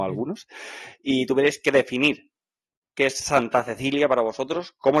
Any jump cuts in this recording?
no; 0 cuts

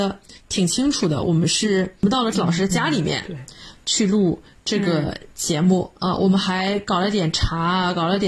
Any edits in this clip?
yes; 2 cuts; at 2.3 s, 6.0 s

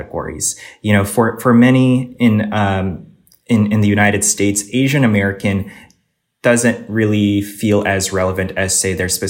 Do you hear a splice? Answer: no; 0 cuts

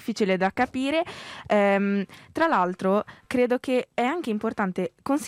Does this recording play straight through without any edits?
yes; 0 cuts

